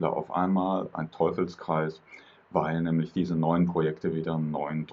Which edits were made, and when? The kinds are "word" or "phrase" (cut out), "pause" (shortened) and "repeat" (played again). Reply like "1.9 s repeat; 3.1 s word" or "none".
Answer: 0.9 s phrase